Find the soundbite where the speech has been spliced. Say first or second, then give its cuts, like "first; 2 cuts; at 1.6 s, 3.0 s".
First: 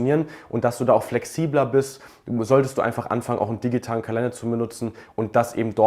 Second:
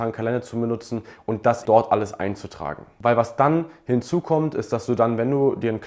second; 1 cut; at 1.6 s